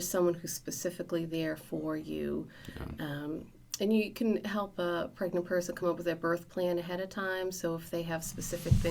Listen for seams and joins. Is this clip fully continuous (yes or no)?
yes